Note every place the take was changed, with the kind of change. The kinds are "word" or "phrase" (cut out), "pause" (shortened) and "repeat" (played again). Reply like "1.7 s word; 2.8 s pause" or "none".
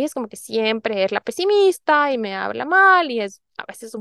none